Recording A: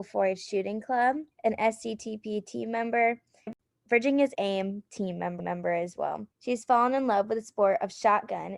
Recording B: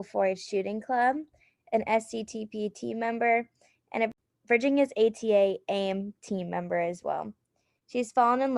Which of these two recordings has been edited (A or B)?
A